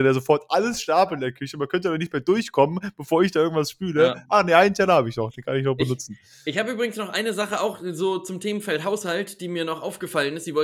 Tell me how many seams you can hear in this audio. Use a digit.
0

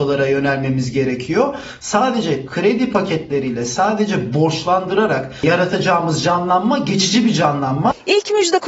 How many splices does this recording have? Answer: 0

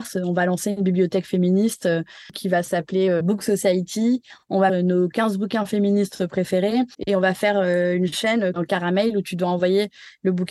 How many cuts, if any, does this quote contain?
4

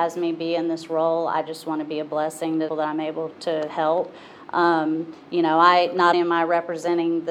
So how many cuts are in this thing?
3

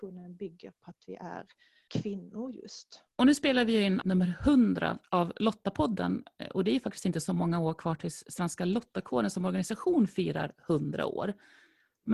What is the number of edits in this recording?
3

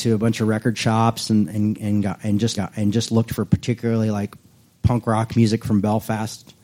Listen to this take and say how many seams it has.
1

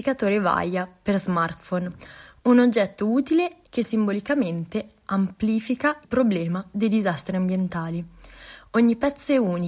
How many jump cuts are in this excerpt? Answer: 2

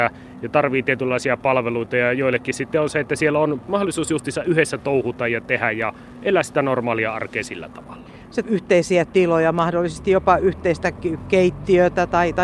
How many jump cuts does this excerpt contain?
2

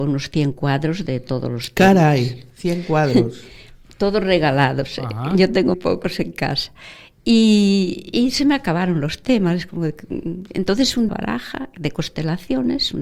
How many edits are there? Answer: 2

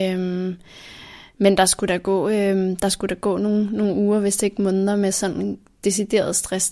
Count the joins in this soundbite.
0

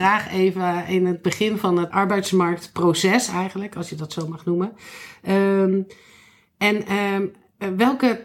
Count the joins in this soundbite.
1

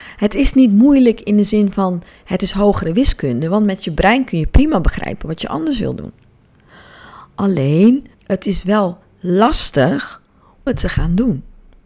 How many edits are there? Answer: 2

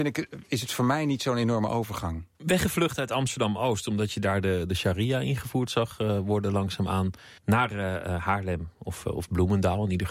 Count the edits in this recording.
2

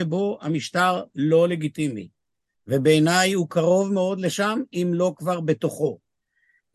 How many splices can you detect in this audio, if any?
0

